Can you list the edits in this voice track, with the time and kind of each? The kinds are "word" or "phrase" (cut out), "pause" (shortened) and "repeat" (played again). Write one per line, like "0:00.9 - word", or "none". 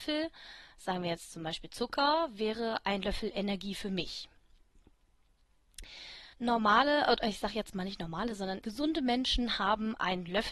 0:06.3 - pause
0:08.6 - word